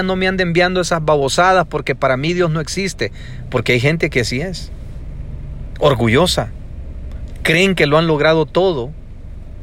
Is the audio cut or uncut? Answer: uncut